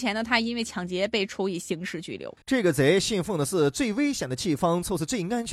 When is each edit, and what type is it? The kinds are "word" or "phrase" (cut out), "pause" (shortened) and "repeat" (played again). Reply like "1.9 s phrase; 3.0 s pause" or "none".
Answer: 2.4 s pause